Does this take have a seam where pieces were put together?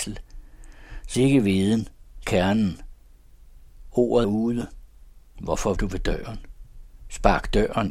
yes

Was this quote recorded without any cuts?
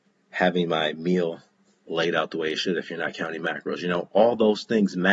yes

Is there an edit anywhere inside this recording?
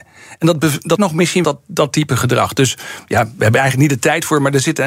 yes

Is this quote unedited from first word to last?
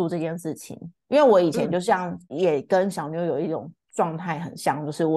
no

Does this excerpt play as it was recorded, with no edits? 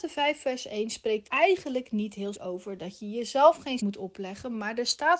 no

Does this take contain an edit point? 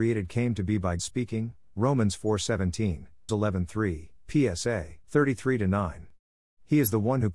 yes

